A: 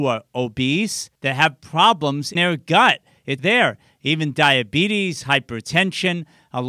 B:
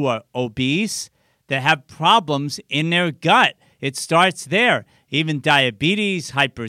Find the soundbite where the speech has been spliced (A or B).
A